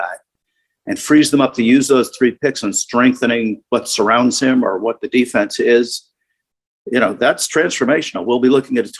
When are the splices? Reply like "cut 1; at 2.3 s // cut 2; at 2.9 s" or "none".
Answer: none